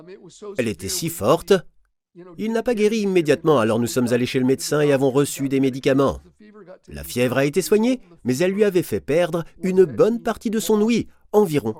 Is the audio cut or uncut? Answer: uncut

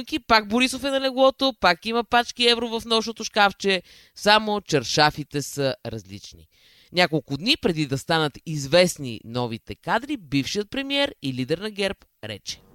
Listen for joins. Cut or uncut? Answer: uncut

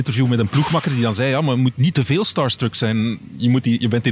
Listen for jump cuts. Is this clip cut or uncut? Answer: uncut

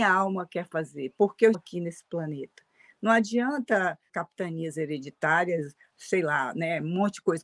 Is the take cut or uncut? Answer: cut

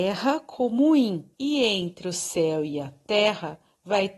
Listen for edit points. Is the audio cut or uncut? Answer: cut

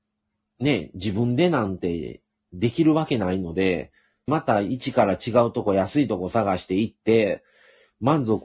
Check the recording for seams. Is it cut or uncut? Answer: cut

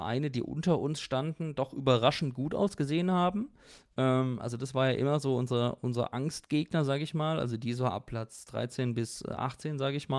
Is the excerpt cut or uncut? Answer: uncut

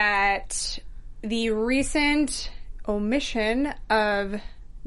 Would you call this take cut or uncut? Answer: uncut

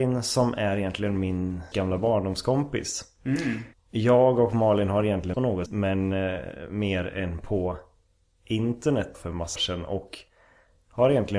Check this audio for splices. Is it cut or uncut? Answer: cut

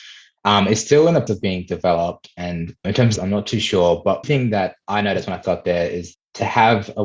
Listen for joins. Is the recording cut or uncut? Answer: cut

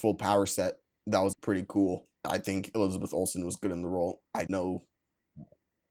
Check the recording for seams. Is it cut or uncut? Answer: cut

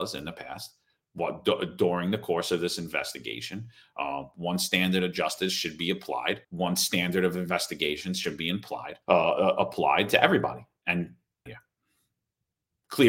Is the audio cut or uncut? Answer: cut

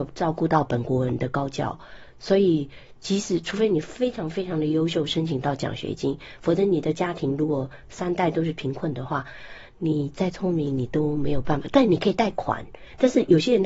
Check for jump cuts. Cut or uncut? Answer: uncut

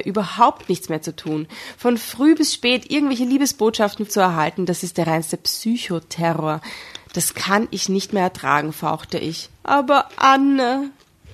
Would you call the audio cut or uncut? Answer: cut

